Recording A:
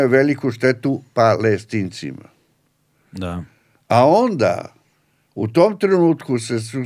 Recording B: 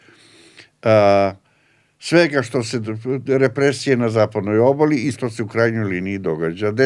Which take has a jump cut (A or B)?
B